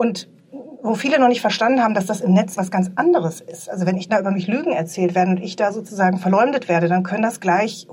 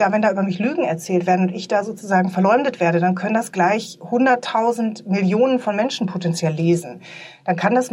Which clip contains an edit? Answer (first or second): first